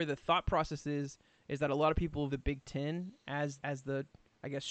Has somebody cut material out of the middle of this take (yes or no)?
yes